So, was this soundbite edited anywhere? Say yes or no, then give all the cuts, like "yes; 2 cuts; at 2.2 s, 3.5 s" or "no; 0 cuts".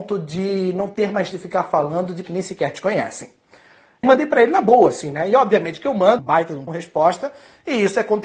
yes; 5 cuts; at 1.3 s, 2.2 s, 4.0 s, 6.2 s, 6.7 s